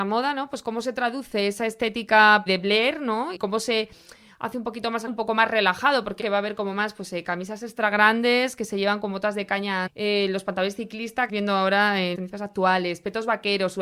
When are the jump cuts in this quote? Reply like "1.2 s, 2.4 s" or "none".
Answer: 2.5 s, 3.3 s, 5.1 s, 6.2 s, 9.9 s, 11.3 s, 12.1 s